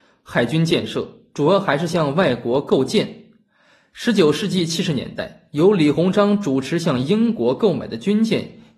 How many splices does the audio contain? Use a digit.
0